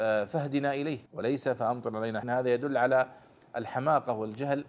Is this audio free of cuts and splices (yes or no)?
no